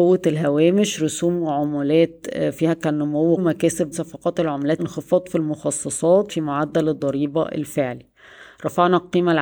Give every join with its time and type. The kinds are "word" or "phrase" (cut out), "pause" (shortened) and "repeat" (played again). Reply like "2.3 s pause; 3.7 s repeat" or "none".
3.4 s word; 3.9 s word; 4.8 s word; 6.3 s word